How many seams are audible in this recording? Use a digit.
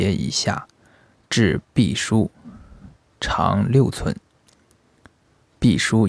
0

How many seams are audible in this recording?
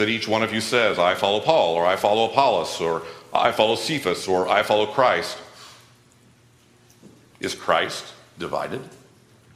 0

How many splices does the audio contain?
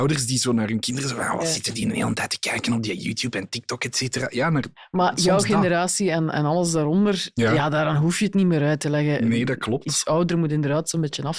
0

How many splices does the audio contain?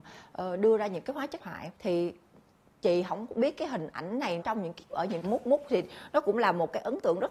5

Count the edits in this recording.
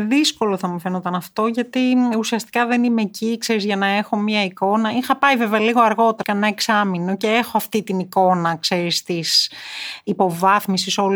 1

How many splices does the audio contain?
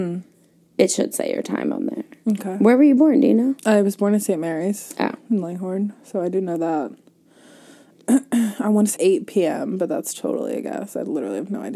2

